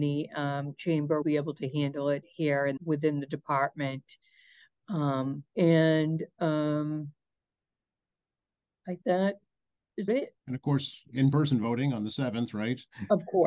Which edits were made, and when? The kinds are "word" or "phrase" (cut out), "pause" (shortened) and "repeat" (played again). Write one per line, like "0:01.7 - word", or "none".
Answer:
0:01.2 - word
0:02.8 - word
0:05.5 - pause
0:09.0 - word
0:10.1 - word
0:10.4 - pause